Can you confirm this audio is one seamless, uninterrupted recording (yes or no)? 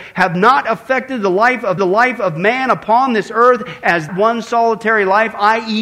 no